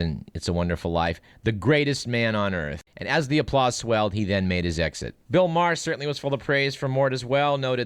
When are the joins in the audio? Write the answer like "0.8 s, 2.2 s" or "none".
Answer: 2.9 s, 5.2 s